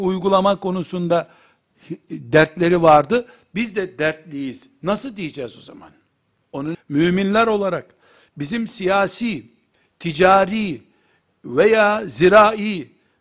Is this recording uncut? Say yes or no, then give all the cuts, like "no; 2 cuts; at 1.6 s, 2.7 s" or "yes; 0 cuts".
no; 1 cut; at 6.7 s